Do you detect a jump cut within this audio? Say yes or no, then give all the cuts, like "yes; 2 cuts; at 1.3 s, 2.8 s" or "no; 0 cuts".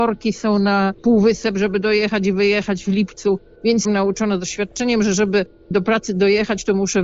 yes; 2 cuts; at 1.0 s, 3.8 s